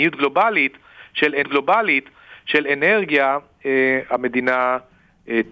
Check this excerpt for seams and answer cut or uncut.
cut